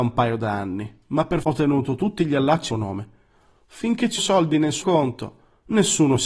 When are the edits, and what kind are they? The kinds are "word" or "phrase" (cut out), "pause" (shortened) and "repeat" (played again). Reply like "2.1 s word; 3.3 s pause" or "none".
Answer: 1.4 s word; 2.7 s word; 4.2 s word; 4.8 s word

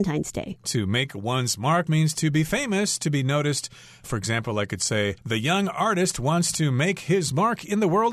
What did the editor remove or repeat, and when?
1.9 s word; 5.2 s pause

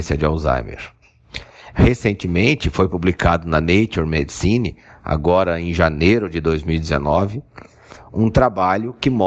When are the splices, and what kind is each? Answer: none

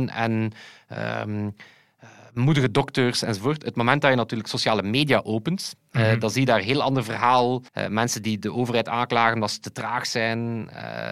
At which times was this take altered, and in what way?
7.7 s pause

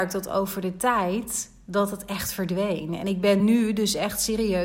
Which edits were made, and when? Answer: none

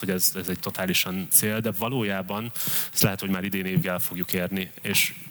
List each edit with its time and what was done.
1.3 s word; 3.8 s word

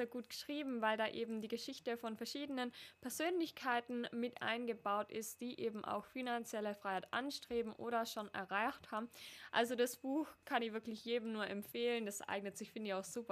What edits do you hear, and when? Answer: none

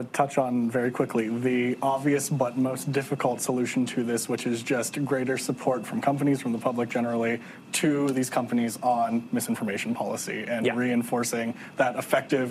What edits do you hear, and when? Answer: none

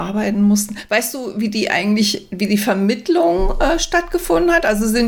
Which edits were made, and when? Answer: none

